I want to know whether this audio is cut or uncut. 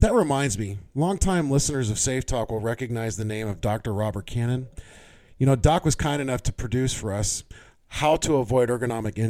uncut